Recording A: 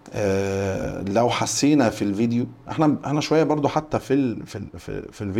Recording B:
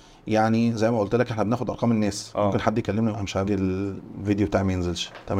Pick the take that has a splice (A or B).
B